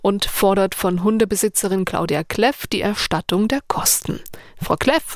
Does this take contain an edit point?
no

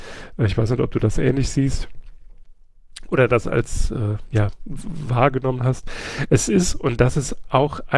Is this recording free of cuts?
yes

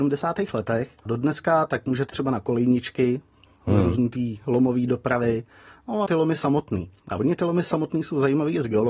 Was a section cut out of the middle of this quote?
yes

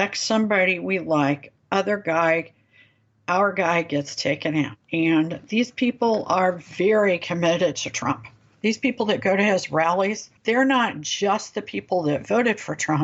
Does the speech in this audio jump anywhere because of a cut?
yes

